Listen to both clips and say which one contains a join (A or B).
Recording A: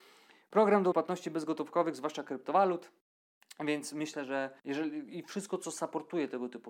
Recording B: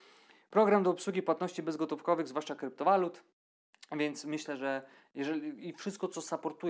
A